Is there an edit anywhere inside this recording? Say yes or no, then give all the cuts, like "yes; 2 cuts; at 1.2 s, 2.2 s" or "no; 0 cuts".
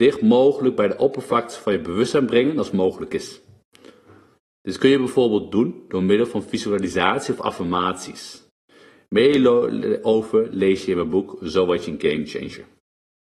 no; 0 cuts